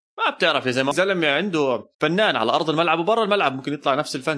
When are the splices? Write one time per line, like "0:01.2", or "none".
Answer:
0:00.9
0:01.9